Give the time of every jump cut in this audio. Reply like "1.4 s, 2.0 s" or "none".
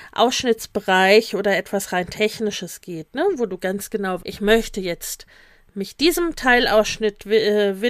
4.2 s

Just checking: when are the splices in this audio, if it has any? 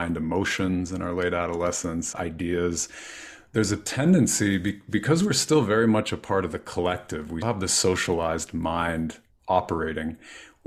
2.1 s, 7.4 s

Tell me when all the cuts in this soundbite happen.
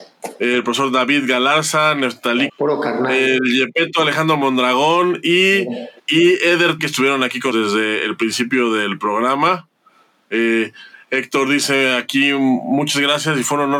2.5 s, 6.0 s, 6.8 s, 7.5 s

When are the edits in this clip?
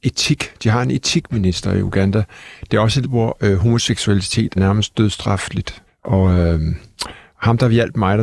3.0 s, 4.6 s, 5.9 s

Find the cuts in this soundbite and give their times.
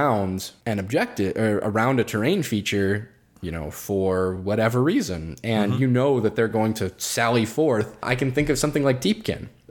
none

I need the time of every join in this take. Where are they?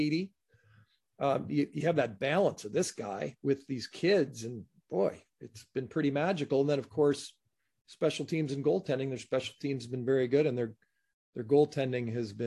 none

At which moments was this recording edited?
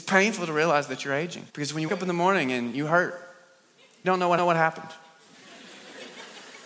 1.5 s, 1.9 s, 4.0 s, 4.4 s

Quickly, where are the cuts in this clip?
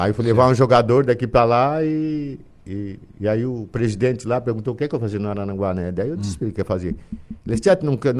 none

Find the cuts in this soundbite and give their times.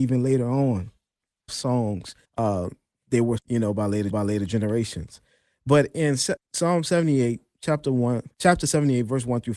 1.5 s, 2.2 s, 3.4 s, 4.1 s, 6.4 s, 8.3 s

